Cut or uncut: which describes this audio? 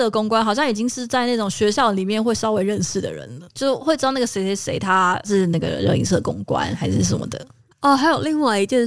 cut